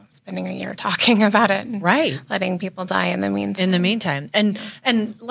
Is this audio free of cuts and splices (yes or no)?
yes